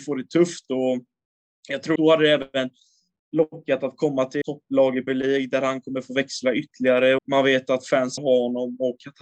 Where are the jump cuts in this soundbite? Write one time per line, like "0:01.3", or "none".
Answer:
0:02.0
0:04.4
0:05.1
0:07.2
0:08.2